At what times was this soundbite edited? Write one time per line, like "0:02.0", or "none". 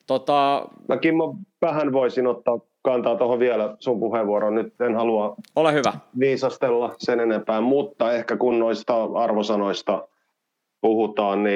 none